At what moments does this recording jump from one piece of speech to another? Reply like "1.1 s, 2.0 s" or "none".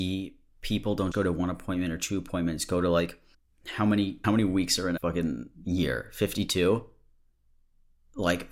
1.1 s, 3.3 s, 4.2 s, 5.0 s, 5.5 s